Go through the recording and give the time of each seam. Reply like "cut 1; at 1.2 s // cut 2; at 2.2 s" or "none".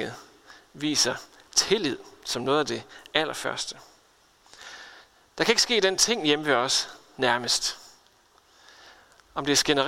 none